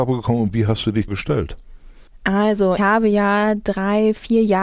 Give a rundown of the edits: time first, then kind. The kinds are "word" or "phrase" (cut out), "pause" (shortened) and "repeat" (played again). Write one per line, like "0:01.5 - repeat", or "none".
0:01.1 - phrase
0:02.8 - word

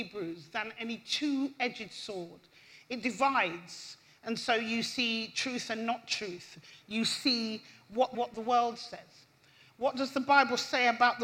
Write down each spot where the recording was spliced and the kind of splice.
0:08.1 - phrase

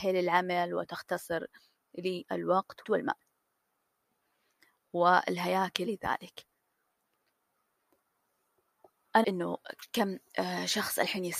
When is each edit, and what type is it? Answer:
0:02.8 - word
0:05.9 - word
0:09.2 - word

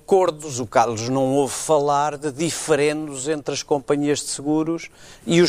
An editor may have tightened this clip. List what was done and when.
none

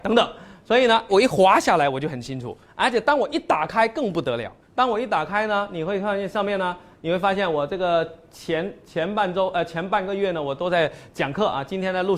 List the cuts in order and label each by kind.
0:01.1 - word
0:04.6 - pause

